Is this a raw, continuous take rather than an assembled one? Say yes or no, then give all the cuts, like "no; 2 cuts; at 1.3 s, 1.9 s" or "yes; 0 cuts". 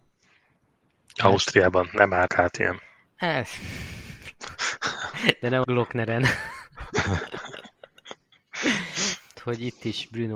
no; 3 cuts; at 2.3 s, 5.6 s, 9.3 s